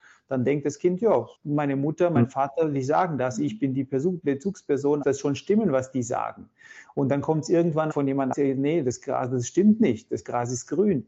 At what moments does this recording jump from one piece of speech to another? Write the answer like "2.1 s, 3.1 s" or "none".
1.3 s, 5.0 s, 7.9 s, 8.3 s